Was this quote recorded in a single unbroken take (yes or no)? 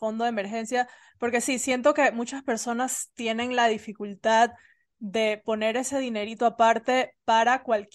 yes